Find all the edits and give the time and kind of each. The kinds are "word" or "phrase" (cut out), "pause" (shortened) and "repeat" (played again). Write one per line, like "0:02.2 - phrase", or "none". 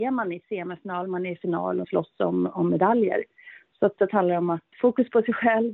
0:01.8 - word
0:04.0 - word
0:04.7 - word